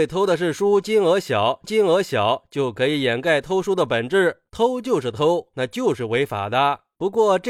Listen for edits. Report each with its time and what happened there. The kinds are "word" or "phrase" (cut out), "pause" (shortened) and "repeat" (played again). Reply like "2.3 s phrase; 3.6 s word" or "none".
1.6 s repeat